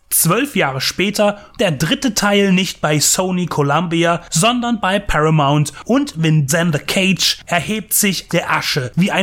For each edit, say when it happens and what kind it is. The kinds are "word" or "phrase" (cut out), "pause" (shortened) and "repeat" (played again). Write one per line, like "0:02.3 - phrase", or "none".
0:01.6 - word
0:06.5 - word
0:08.3 - word